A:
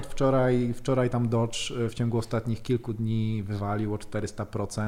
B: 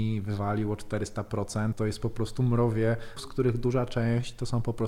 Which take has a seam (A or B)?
B